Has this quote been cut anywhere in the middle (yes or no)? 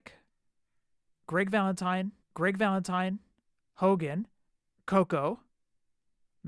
yes